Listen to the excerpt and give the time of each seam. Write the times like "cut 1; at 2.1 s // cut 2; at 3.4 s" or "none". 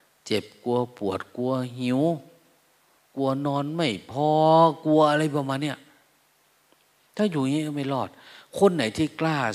none